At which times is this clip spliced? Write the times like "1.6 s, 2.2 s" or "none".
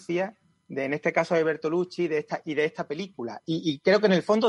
none